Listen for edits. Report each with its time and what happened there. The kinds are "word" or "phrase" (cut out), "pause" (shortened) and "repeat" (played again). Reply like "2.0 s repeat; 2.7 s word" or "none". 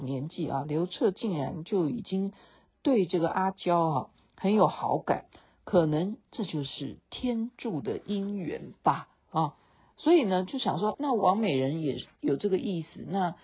10.9 s word; 12.1 s pause

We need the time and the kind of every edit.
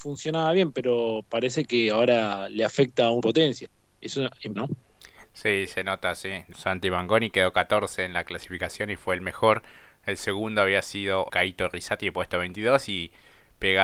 3.2 s phrase; 4.6 s word; 6.5 s word; 11.3 s word

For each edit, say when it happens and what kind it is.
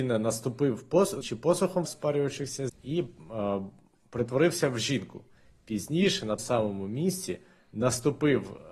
1.2 s word; 1.8 s word; 2.7 s word; 6.4 s word

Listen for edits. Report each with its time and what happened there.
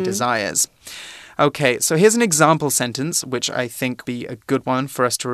4.0 s word

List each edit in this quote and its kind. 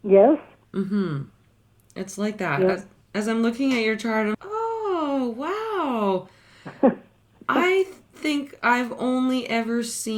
4.3 s word

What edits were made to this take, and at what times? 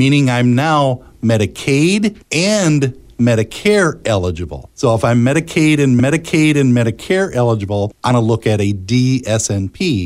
2.2 s pause; 6.0 s repeat; 8.1 s word

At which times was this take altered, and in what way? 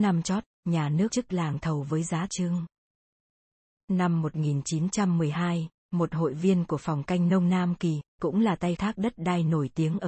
1.1 s word; 2.3 s word; 8.1 s pause; 8.8 s word

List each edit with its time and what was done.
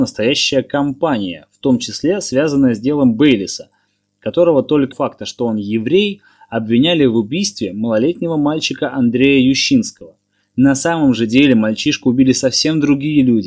4.9 s phrase

